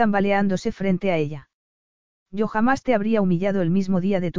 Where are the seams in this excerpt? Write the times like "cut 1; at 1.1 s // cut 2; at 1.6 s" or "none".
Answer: none